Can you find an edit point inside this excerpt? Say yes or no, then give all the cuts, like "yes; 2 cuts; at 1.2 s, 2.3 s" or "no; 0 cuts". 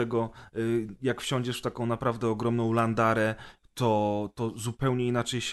no; 0 cuts